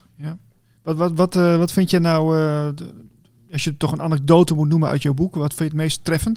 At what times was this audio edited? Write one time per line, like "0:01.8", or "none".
none